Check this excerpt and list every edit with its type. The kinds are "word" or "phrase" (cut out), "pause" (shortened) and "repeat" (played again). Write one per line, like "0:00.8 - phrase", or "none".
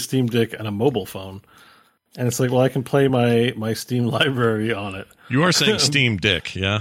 none